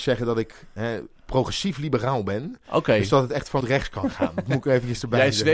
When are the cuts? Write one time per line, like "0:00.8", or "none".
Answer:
0:03.6